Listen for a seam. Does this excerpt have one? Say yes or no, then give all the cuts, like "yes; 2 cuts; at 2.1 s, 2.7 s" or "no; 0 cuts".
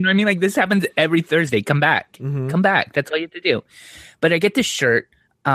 no; 0 cuts